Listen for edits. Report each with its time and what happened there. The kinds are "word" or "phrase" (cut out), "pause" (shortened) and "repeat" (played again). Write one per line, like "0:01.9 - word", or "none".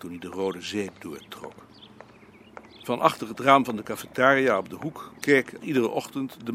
0:05.6 - word